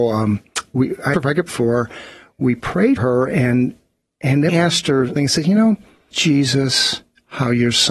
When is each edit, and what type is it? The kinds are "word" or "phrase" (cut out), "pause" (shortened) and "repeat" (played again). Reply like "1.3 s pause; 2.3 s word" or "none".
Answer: 1.1 s word; 1.5 s word; 3.0 s word; 4.5 s word; 5.2 s word; 6.1 s word